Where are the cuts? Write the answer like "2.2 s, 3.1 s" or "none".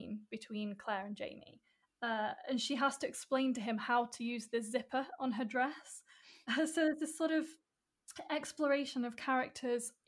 none

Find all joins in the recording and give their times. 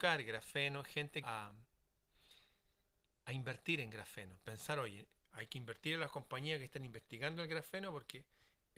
1.2 s

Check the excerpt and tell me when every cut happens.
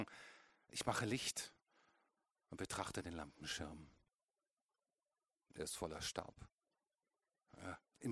none

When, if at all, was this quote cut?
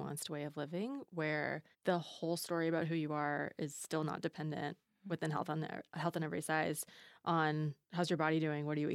1.7 s, 7.8 s

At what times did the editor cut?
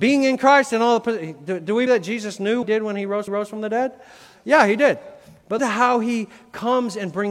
1.9 s, 2.6 s, 3.3 s, 5.6 s

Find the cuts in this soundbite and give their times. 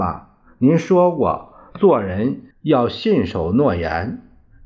2.5 s

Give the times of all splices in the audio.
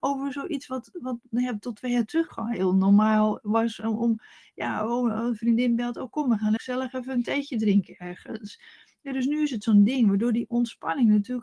2.3 s, 6.6 s

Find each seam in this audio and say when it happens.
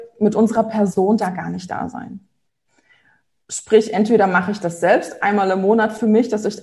none

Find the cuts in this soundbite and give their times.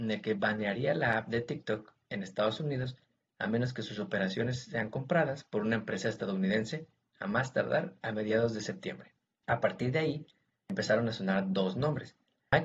none

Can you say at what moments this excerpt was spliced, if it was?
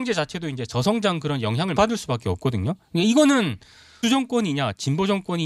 1.8 s, 4.0 s

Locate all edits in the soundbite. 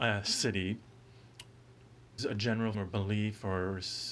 2.2 s, 2.7 s

